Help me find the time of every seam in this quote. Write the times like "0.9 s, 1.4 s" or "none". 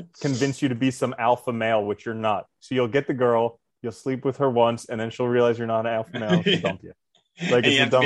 none